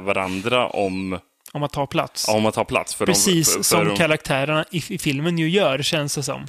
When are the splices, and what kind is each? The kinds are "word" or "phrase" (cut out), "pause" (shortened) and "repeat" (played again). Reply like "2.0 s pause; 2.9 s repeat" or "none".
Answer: none